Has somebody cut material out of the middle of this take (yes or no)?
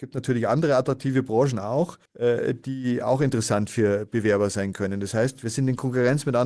yes